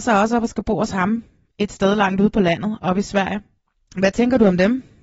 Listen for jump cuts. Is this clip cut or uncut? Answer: uncut